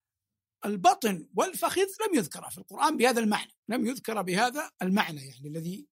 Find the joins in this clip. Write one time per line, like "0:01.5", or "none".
0:03.6
0:04.7